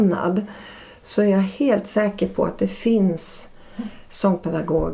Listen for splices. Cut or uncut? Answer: uncut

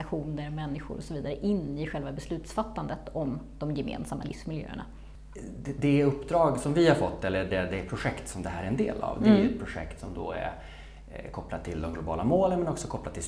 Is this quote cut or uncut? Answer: uncut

